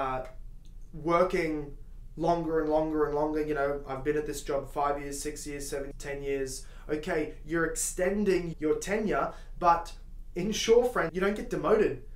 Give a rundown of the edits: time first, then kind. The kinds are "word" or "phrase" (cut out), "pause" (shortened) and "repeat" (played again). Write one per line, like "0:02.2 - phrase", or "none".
0:05.9 - word
0:08.5 - word
0:11.1 - word